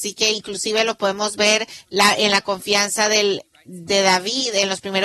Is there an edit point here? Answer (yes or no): no